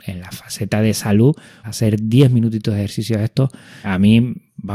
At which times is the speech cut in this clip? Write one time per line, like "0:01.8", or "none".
0:01.6
0:03.8